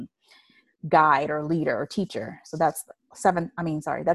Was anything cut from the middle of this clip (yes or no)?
no